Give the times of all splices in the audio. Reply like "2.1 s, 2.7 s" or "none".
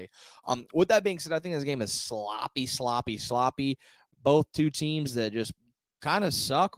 none